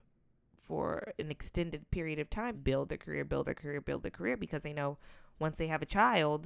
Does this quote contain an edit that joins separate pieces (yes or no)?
yes